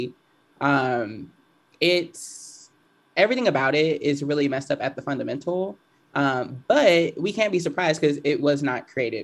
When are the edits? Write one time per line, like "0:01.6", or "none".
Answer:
none